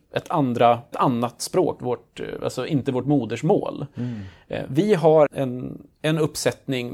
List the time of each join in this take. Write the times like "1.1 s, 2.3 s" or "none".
0.9 s, 1.8 s, 5.3 s